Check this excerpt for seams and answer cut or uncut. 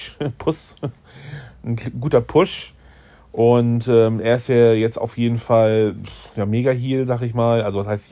uncut